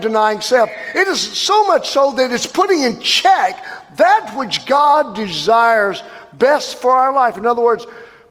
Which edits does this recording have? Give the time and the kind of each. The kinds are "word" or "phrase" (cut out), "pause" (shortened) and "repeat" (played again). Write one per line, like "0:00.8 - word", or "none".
none